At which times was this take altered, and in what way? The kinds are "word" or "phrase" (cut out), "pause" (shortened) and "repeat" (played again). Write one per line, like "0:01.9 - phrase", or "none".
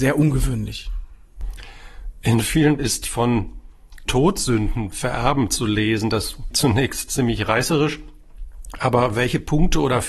0:02.8 - word
0:04.1 - word
0:04.9 - word
0:06.5 - word